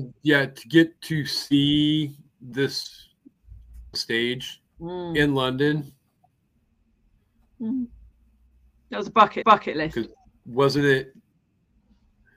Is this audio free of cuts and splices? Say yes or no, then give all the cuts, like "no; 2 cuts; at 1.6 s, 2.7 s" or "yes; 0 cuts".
no; 4 cuts; at 1.0 s, 3.9 s, 4.7 s, 9.4 s